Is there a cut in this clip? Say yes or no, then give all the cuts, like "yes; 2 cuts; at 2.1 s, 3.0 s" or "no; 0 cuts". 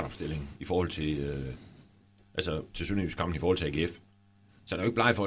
no; 0 cuts